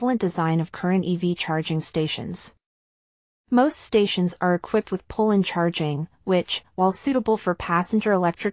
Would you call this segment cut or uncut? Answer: uncut